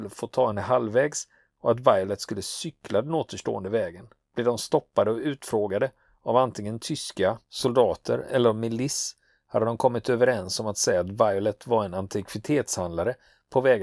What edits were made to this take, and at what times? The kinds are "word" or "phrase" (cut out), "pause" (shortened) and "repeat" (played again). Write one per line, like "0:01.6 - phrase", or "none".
0:04.2 - pause